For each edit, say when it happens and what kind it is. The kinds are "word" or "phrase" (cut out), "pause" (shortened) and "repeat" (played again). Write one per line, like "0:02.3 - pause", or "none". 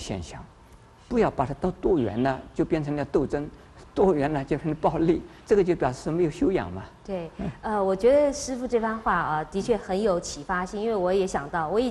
0:05.4 - pause
0:07.0 - pause